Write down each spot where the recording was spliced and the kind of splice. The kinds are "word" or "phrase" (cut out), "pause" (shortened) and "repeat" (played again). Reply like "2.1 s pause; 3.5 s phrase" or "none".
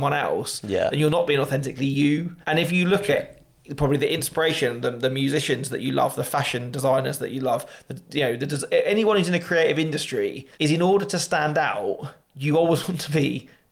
2.4 s pause; 10.5 s pause; 12.2 s pause